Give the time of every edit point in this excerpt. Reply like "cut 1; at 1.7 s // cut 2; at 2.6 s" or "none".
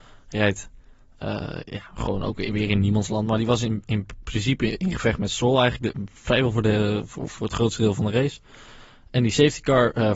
none

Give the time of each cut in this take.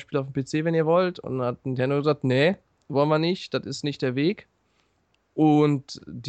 none

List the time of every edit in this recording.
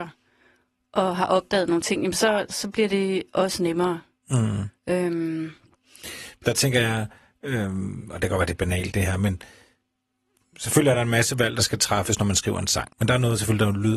cut 1; at 4.8 s // cut 2; at 12.9 s

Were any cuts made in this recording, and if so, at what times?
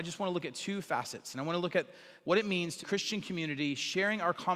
cut 1; at 2.2 s // cut 2; at 2.8 s

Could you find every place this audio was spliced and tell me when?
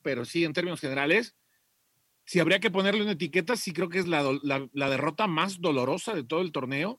none

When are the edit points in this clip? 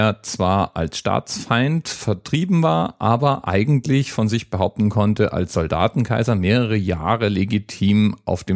none

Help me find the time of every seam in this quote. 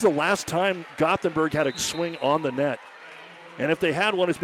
cut 1; at 1.7 s

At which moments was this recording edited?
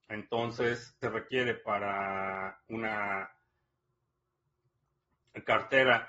cut 1; at 1.0 s

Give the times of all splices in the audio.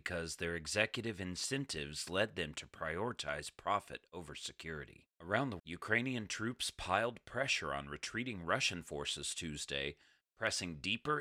cut 1; at 5.1 s // cut 2; at 5.6 s

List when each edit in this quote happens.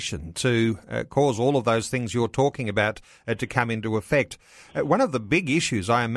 none

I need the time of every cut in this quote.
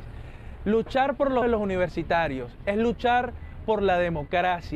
cut 1; at 1.4 s

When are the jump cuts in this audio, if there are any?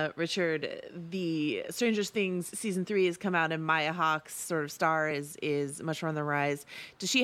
none

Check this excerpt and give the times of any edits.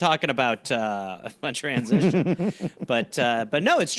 cut 1; at 1.5 s

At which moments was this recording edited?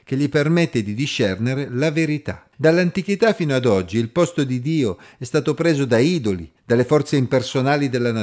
cut 1; at 2.5 s // cut 2; at 6.6 s

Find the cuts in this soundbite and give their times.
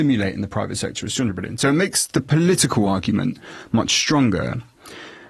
none

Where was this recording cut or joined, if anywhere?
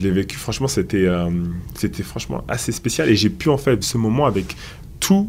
cut 1; at 3.8 s

